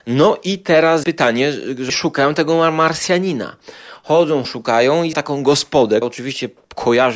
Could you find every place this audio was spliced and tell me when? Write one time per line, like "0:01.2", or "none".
0:01.0
0:01.9
0:04.4
0:05.1
0:06.0